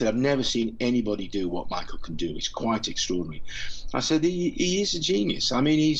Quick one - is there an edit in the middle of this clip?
no; 0 cuts

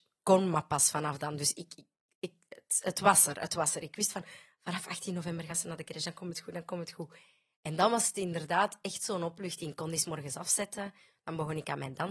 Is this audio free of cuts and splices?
yes; 0 cuts

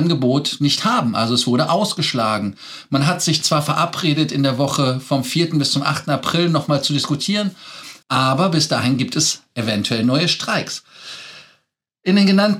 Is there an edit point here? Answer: yes; 1 cut; at 8.0 s

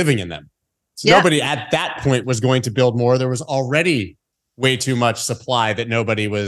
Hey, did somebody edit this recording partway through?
no; 0 cuts

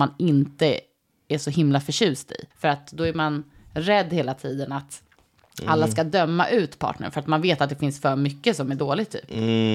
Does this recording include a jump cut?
yes; 1 cut; at 2.5 s

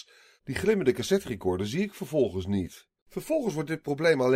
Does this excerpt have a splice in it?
yes; 1 cut; at 3.0 s

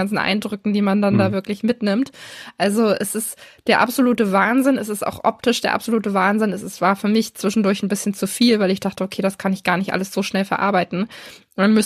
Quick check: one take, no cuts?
yes; 0 cuts

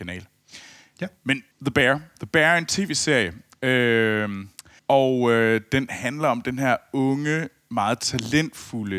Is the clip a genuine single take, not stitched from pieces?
no; 2 cuts; at 1.5 s, 4.8 s

